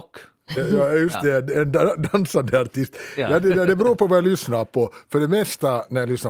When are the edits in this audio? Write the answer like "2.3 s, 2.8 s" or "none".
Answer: none